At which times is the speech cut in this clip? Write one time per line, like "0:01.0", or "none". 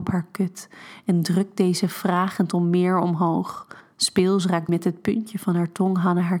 0:03.8
0:04.7